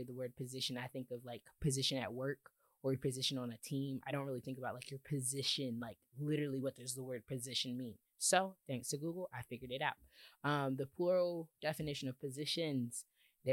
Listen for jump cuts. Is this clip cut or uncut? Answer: uncut